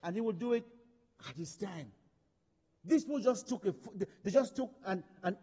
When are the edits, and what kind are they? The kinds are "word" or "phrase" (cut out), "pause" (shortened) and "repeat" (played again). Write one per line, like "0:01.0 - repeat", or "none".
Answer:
none